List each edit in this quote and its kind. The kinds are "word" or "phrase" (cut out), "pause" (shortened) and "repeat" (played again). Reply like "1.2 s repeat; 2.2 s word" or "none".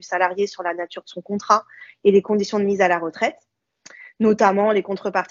none